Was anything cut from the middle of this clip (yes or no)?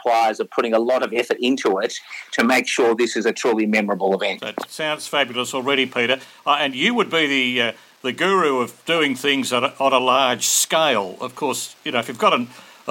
no